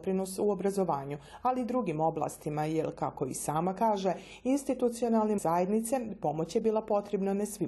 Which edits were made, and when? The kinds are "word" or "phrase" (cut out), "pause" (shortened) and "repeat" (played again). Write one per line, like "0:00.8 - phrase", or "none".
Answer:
0:05.4 - word